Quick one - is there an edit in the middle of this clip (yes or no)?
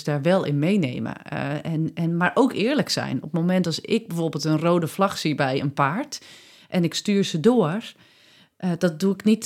no